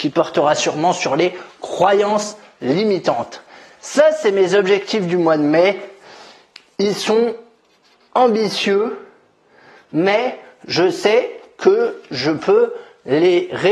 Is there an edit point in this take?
no; 0 cuts

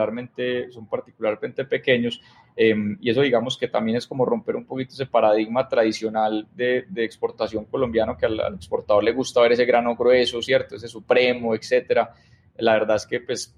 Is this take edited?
no; 0 cuts

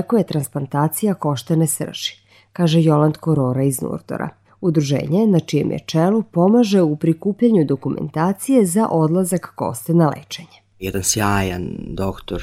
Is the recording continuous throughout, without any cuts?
yes; 0 cuts

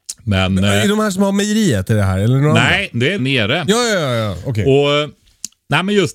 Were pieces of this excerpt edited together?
yes; 1 cut; at 3.2 s

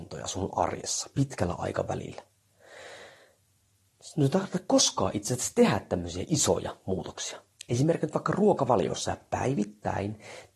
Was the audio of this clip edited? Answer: yes; 1 cut; at 7.6 s

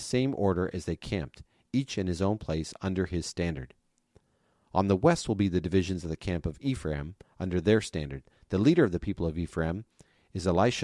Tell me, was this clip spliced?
no; 0 cuts

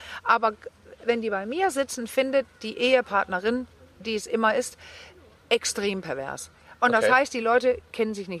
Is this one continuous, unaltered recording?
yes; 0 cuts

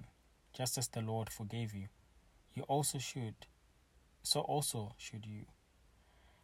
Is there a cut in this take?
no; 0 cuts

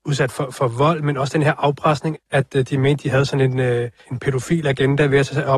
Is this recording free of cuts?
no; 2 cuts; at 2.1 s, 4.0 s

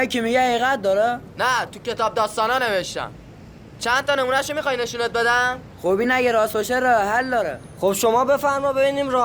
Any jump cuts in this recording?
no; 0 cuts

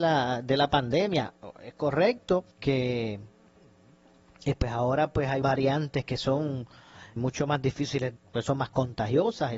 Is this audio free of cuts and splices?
no; 4 cuts; at 2.5 s, 5.4 s, 7.2 s, 8.2 s

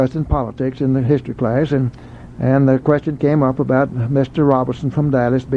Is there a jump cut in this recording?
no; 0 cuts

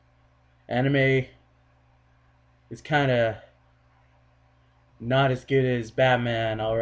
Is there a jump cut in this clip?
no; 0 cuts

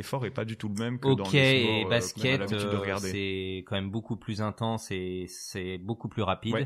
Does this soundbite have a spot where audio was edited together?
no; 0 cuts

